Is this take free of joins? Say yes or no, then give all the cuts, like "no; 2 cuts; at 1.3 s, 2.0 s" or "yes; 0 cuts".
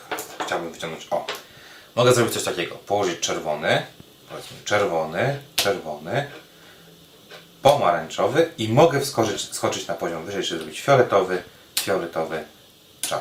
yes; 0 cuts